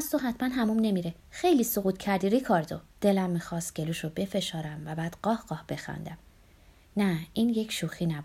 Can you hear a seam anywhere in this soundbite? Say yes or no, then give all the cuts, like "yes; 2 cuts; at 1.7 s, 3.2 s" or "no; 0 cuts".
yes; 2 cuts; at 1.2 s, 2.9 s